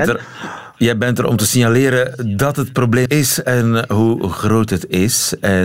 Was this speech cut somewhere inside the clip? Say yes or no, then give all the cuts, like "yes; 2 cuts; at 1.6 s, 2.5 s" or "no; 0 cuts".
yes; 1 cut; at 3.1 s